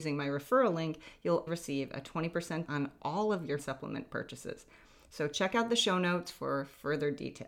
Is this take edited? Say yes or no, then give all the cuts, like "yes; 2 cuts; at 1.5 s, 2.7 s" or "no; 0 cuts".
yes; 3 cuts; at 1.5 s, 2.7 s, 3.6 s